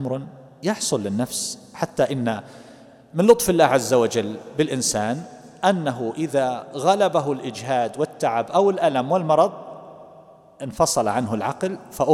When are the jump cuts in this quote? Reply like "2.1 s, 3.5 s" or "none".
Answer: none